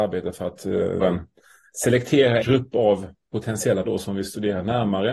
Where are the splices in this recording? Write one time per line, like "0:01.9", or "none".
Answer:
0:01.0
0:02.4
0:03.8